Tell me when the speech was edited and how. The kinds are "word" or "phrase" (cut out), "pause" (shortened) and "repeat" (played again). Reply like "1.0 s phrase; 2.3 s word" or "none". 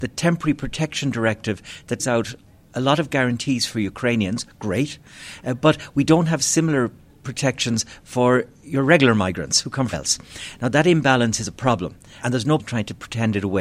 2.0 s word; 9.9 s word; 12.2 s word; 12.6 s word